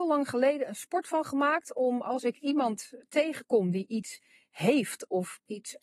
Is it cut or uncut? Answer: uncut